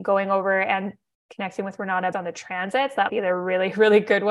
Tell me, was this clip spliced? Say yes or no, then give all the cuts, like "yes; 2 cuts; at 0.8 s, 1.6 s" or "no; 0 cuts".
yes; 2 cuts; at 2.1 s, 3.1 s